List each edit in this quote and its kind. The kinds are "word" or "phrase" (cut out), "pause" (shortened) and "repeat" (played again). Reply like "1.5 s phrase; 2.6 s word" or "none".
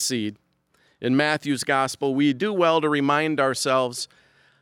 none